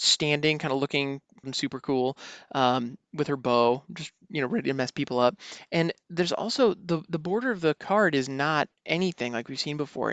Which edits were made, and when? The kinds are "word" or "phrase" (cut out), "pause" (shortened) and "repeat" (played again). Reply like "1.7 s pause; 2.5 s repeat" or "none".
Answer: 1.4 s word